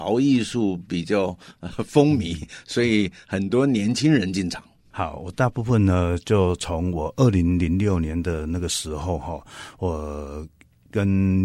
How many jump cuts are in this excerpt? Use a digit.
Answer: 0